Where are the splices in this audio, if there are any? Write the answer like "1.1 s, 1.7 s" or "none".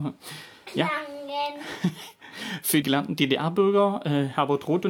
2.8 s